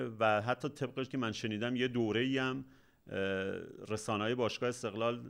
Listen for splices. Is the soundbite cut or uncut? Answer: cut